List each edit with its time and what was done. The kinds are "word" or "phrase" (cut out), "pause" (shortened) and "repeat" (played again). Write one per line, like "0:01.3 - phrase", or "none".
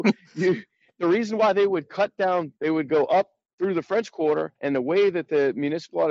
0:02.6 - pause
0:03.4 - pause
0:04.6 - pause

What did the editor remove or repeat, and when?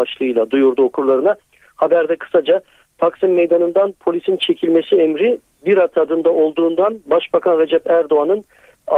none

